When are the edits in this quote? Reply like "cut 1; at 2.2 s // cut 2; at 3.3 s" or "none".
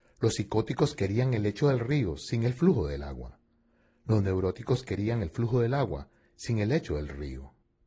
none